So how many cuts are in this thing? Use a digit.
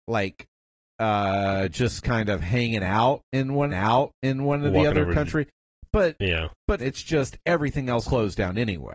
3